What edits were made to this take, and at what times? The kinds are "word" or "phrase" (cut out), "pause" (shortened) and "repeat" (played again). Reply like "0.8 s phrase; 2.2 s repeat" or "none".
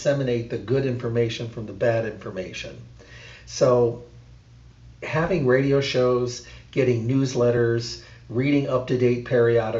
none